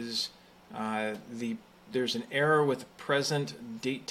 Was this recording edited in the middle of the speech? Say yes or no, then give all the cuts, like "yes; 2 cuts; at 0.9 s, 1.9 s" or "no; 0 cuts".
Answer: no; 0 cuts